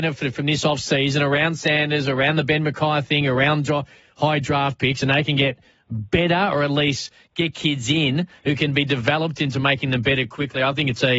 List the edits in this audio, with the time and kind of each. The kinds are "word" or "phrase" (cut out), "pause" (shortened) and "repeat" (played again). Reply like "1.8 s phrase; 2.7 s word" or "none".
none